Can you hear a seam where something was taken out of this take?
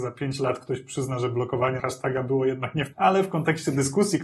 yes; 2 cuts; at 1.8 s, 2.9 s

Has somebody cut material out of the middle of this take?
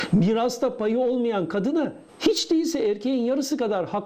yes; 1 cut; at 2.1 s

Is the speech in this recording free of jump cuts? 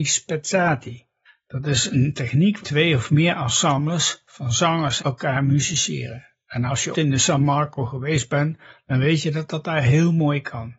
no; 4 cuts; at 1.3 s, 2.6 s, 5.0 s, 6.9 s

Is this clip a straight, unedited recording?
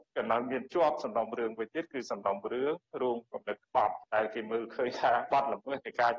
yes; 0 cuts

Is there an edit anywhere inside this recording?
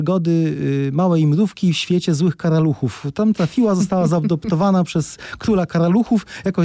no; 0 cuts

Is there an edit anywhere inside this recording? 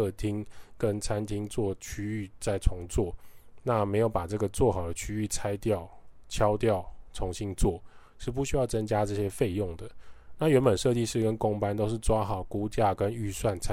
no; 0 cuts

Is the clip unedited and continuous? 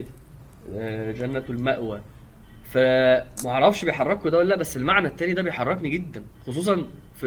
yes; 0 cuts

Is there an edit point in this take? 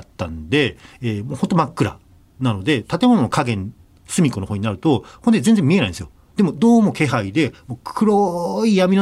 no; 0 cuts

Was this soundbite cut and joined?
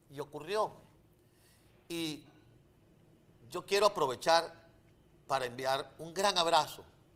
no; 0 cuts

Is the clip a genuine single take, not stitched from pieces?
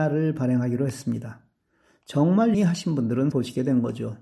no; 2 cuts; at 2.5 s, 3.3 s

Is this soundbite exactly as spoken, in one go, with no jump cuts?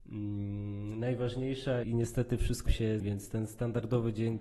no; 3 cuts; at 1.8 s, 2.7 s, 3.0 s

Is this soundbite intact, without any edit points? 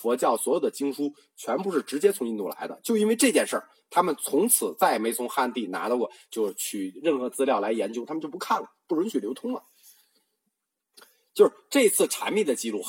yes; 0 cuts

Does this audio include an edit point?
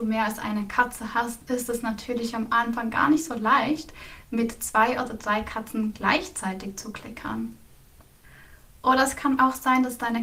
no; 0 cuts

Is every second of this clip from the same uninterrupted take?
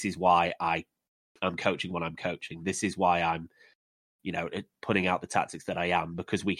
yes; 0 cuts

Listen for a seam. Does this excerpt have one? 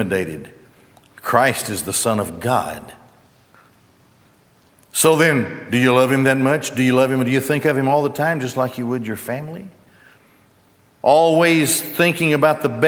no; 0 cuts

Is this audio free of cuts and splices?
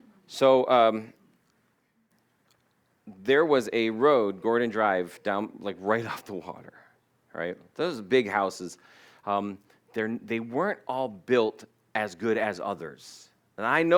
yes; 0 cuts

